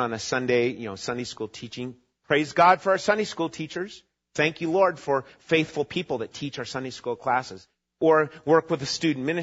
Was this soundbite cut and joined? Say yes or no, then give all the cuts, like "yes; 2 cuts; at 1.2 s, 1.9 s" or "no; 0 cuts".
no; 0 cuts